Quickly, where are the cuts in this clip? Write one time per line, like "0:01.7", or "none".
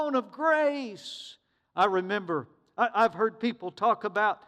none